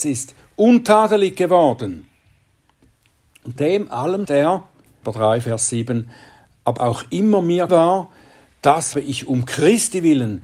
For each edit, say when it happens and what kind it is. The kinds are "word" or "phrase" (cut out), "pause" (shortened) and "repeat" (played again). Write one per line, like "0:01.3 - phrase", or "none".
0:03.6 - word
0:04.2 - word
0:05.0 - word
0:06.8 - word
0:07.7 - word
0:08.9 - word